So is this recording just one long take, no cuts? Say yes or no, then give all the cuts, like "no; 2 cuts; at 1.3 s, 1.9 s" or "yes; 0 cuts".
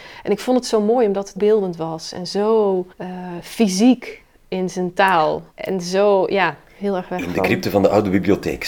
no; 3 cuts; at 1.4 s, 2.9 s, 5.5 s